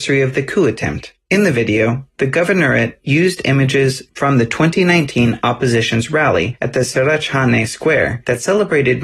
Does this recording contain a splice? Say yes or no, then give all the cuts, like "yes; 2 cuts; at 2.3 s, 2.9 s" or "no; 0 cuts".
no; 0 cuts